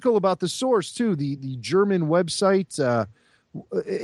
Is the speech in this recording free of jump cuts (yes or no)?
yes